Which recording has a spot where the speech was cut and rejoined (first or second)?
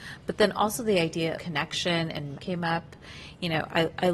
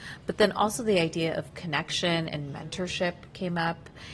first